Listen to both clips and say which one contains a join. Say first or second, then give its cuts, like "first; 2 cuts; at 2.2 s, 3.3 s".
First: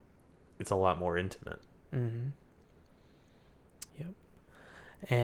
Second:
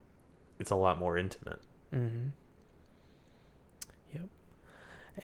first; 1 cut; at 3.9 s